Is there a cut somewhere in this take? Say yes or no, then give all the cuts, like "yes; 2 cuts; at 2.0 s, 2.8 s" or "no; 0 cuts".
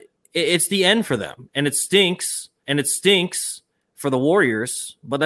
yes; 1 cut; at 2.6 s